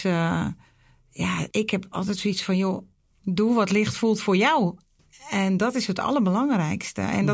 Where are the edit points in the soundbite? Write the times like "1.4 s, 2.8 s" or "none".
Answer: 1.5 s, 3.1 s, 5.0 s